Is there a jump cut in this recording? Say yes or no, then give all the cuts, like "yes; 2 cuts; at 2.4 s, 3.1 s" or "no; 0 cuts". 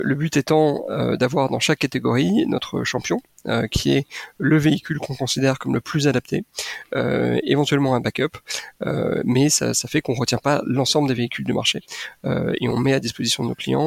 no; 0 cuts